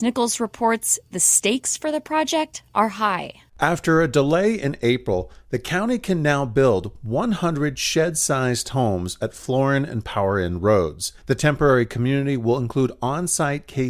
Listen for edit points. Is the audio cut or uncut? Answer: cut